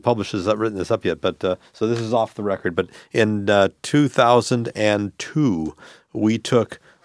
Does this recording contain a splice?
no; 0 cuts

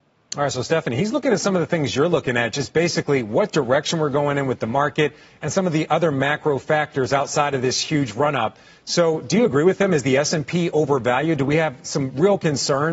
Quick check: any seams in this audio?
no; 0 cuts

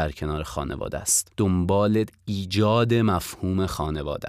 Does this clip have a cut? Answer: yes; 1 cut; at 1.3 s

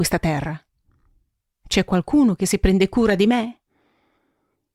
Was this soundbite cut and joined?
no; 0 cuts

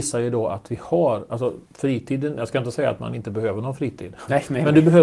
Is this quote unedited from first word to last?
no; 1 cut; at 1.7 s

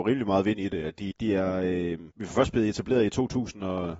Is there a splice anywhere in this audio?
yes; 2 cuts; at 1.1 s, 2.1 s

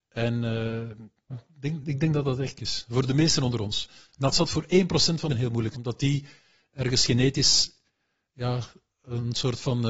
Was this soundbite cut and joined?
yes; 5 cuts; at 1.3 s, 2.6 s, 4.3 s, 5.3 s, 5.7 s

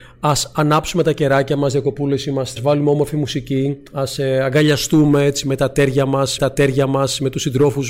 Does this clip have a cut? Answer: yes; 2 cuts; at 2.6 s, 6.4 s

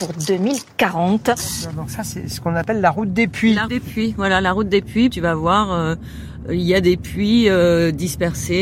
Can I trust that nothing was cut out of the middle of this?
no; 2 cuts; at 3.7 s, 5.1 s

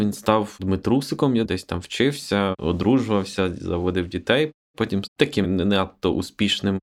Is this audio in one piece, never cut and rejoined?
no; 3 cuts; at 1.4 s, 5.1 s, 5.4 s

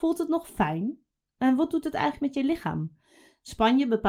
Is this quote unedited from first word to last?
yes; 0 cuts

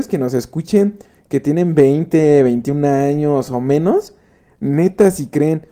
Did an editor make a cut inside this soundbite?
no; 0 cuts

